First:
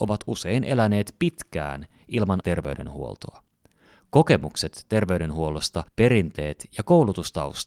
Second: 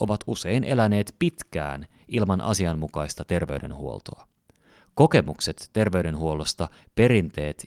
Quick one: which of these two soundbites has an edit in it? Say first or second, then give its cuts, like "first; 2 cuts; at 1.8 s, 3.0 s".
first; 2 cuts; at 2.4 s, 5.9 s